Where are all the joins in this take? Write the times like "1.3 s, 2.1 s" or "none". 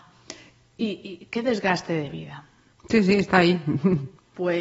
none